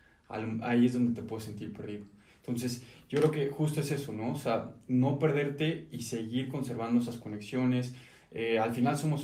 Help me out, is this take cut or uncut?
uncut